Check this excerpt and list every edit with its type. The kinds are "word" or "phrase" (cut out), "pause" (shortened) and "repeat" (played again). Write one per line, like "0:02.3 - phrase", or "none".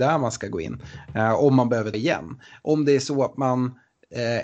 0:01.9 - word